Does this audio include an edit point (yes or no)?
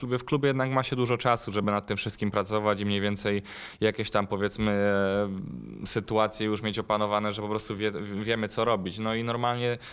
no